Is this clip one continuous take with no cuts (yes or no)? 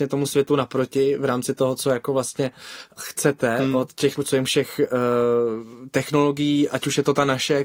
no